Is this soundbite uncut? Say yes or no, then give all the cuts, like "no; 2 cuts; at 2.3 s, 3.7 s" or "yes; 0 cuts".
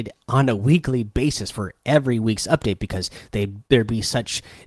no; 1 cut; at 3.6 s